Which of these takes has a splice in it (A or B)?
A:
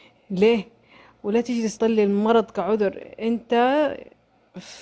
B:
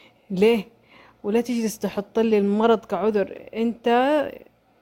A